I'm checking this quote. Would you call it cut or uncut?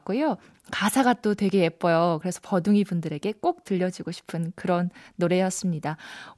uncut